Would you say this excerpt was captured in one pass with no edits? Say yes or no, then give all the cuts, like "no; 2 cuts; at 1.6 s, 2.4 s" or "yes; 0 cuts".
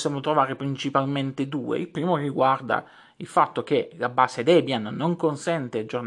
yes; 0 cuts